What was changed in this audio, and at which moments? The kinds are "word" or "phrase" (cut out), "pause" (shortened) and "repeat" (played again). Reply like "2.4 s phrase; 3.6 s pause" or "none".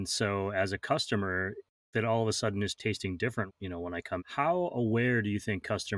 1.9 s word; 2.8 s word; 3.5 s word; 4.2 s word